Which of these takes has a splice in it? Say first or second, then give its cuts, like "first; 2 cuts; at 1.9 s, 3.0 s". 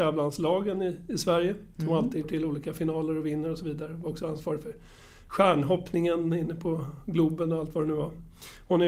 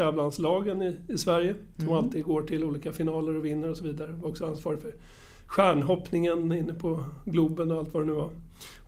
first; 1 cut; at 2.2 s